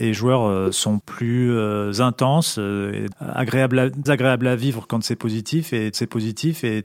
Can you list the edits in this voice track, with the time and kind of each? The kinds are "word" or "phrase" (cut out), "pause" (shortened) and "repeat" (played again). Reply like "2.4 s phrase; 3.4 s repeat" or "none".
1.0 s phrase; 3.1 s word; 4.1 s word; 5.9 s repeat